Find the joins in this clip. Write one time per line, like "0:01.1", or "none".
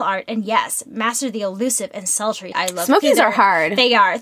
0:02.5

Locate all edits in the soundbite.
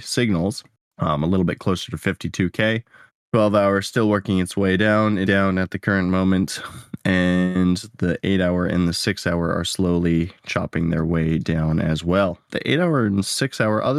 0:05.2

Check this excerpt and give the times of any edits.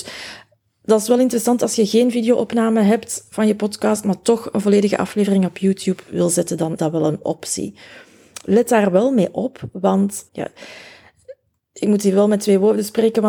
0:06.8
0:10.3

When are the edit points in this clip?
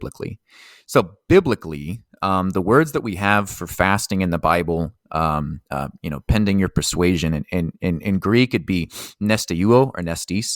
0:05.7

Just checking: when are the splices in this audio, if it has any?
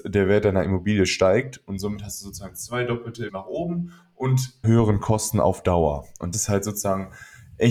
0:03.3
0:04.6
0:06.3

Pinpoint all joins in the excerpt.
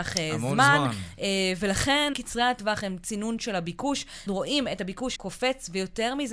0:02.1
0:04.3
0:05.2

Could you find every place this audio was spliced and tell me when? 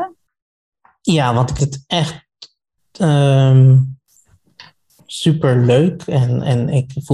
0:01.6

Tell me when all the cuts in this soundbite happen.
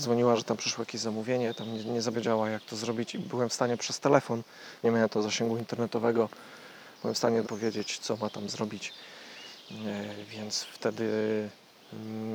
0:02.1
0:04.8
0:07.4

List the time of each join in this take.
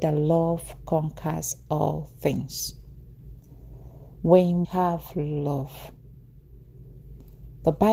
0:04.6

